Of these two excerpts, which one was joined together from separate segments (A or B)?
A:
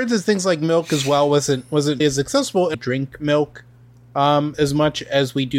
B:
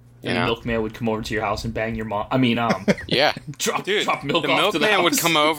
A